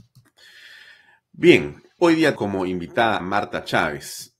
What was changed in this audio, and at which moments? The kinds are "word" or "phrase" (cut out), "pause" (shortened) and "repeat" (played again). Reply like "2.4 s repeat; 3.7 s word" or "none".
2.0 s word; 2.4 s word; 3.2 s word

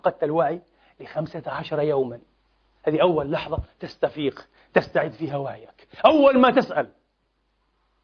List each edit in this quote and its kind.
none

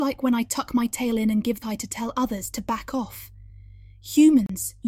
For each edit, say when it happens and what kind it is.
1.6 s word

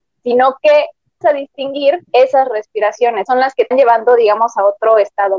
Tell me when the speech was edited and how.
1.2 s word; 2.1 s pause; 3.3 s word; 3.7 s word

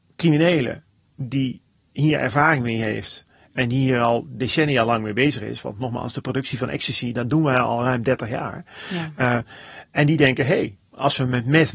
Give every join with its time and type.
none

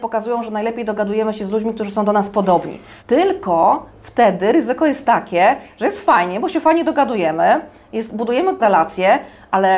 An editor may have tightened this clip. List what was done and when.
3.0 s pause; 8.6 s word

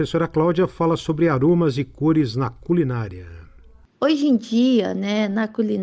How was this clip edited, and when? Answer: none

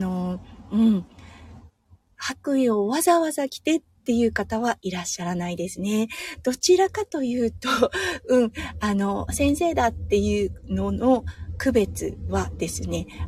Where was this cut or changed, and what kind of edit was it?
9.3 s word

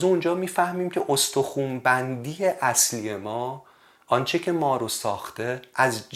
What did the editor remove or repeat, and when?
none

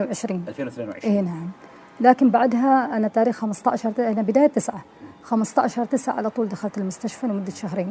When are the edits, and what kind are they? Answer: none

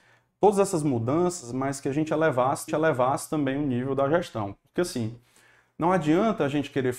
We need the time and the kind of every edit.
2.7 s repeat

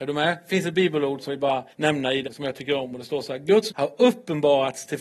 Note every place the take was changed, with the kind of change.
1.3 s word; 1.7 s pause; 2.2 s word; 3.7 s word

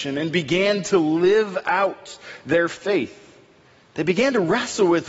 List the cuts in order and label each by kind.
none

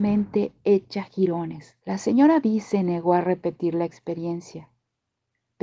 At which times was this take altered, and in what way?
1.8 s pause

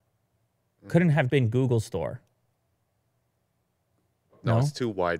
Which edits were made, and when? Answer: 1.3 s word

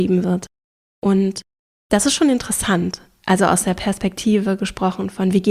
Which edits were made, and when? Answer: none

